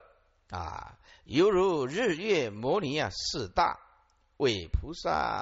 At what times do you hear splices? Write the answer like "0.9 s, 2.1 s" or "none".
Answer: 1.1 s